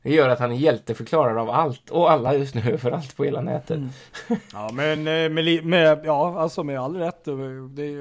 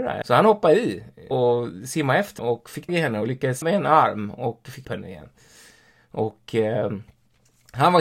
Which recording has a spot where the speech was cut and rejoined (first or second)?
second